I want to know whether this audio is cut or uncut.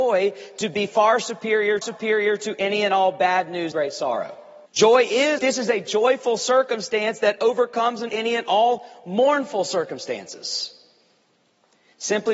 cut